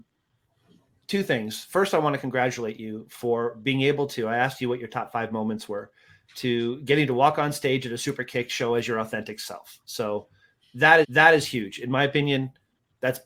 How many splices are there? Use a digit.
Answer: 1